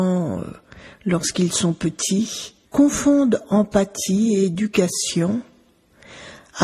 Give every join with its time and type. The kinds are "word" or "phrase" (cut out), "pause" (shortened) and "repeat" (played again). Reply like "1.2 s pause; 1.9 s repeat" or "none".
2.7 s pause